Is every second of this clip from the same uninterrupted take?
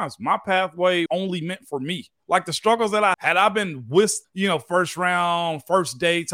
no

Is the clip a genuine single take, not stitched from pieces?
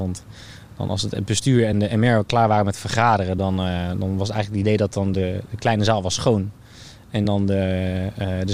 yes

